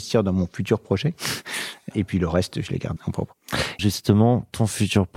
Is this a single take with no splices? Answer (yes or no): no